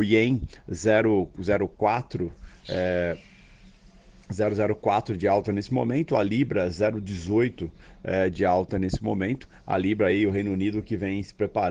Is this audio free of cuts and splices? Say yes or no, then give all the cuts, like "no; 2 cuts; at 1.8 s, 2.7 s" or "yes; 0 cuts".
yes; 0 cuts